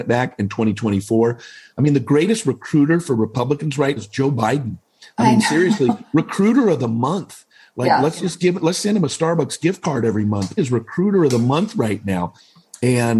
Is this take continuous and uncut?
no; 2 cuts; at 4.0 s, 10.6 s

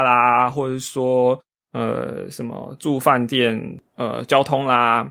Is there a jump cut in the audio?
no; 0 cuts

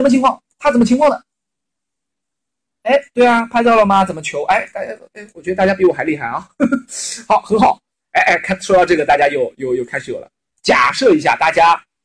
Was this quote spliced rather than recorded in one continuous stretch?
yes; 1 cut; at 10.5 s

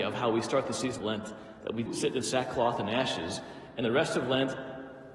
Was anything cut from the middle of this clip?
yes; 3 cuts; at 1.0 s, 1.9 s, 3.8 s

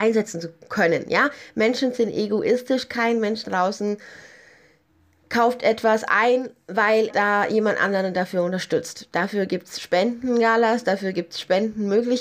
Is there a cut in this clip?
yes; 2 cuts; at 3.4 s, 7.1 s

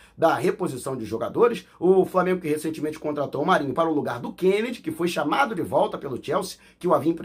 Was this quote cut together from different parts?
no; 0 cuts

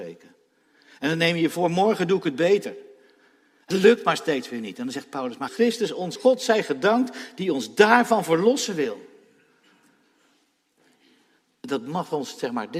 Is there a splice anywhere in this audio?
yes; 3 cuts; at 3.7 s, 5.5 s, 6.2 s

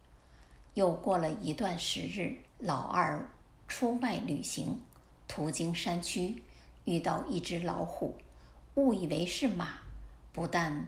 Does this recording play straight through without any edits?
no; 1 cut; at 2.5 s

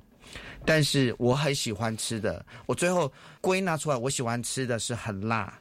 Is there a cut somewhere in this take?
yes; 1 cut; at 3.4 s

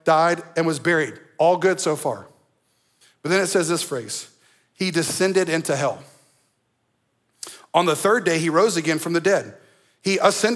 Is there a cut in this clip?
no; 0 cuts

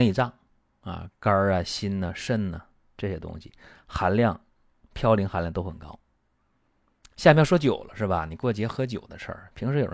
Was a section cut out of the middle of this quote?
no; 0 cuts

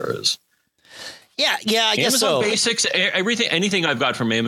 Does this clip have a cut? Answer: no; 0 cuts

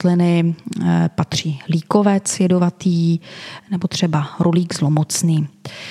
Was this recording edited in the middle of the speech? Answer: no; 0 cuts

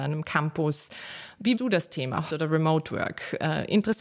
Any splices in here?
yes; 2 cuts; at 1.6 s, 2.3 s

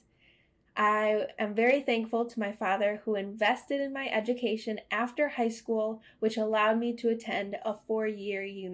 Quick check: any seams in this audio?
no; 0 cuts

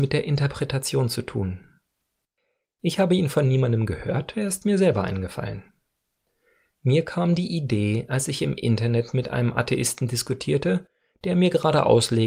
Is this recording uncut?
yes; 0 cuts

